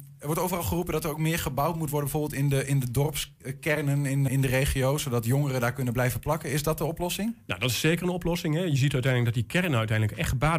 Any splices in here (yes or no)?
yes